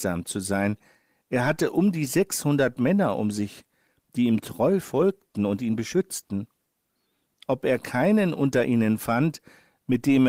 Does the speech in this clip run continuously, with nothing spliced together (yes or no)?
yes